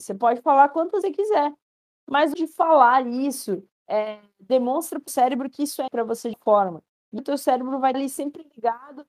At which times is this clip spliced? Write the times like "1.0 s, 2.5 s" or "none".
1.0 s, 2.3 s, 3.7 s, 5.1 s, 5.9 s, 6.3 s, 7.2 s, 7.9 s